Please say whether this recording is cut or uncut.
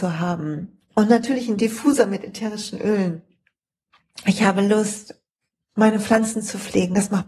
uncut